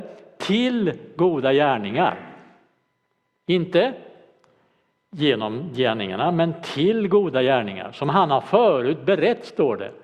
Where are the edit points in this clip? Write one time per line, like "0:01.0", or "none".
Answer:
none